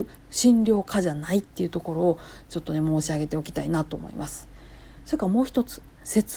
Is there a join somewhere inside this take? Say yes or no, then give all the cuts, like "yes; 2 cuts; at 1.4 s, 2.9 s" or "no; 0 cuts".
no; 0 cuts